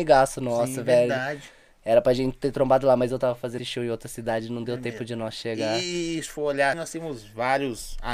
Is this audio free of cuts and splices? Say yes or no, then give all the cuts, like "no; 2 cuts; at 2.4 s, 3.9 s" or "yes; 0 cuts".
no; 2 cuts; at 3.6 s, 6.7 s